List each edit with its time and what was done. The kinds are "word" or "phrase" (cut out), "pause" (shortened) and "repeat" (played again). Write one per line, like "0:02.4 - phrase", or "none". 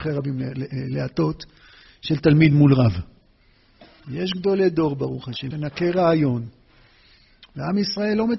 0:05.5 - word